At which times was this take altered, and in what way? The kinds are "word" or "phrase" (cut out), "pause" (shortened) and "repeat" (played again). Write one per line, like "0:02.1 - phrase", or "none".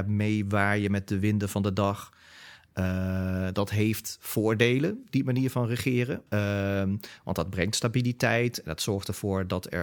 0:06.3 - pause